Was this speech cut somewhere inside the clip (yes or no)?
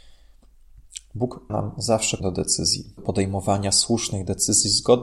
yes